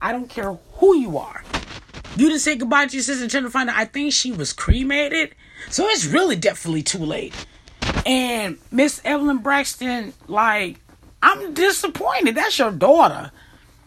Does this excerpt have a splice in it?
no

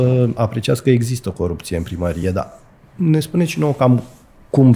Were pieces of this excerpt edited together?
no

